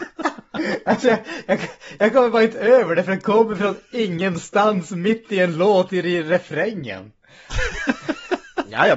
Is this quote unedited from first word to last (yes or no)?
yes